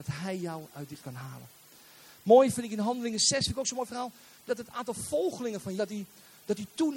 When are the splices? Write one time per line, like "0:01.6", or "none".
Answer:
0:01.0
0:02.5
0:04.5
0:05.8